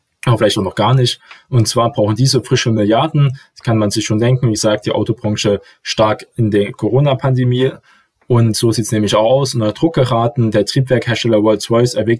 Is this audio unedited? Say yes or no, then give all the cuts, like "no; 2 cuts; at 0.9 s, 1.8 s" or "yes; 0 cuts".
yes; 0 cuts